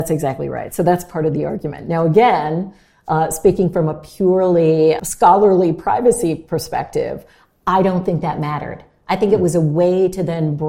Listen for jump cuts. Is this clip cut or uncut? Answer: uncut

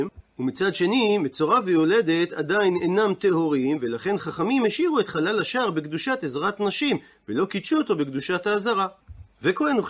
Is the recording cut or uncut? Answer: uncut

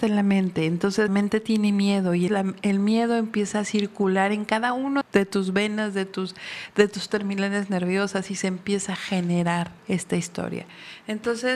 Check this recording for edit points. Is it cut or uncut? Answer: cut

